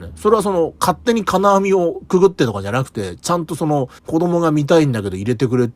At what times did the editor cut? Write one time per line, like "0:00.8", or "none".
0:04.0